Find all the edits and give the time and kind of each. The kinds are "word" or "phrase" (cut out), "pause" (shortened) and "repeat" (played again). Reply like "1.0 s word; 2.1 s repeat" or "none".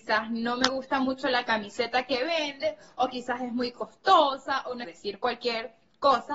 4.8 s phrase